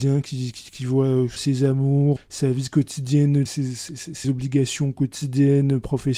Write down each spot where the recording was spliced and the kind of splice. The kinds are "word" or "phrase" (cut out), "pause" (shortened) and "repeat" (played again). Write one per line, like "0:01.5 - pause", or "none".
0:01.4 - word
0:02.2 - word
0:03.5 - word
0:04.2 - word